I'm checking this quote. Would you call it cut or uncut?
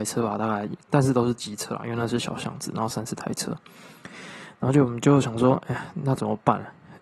uncut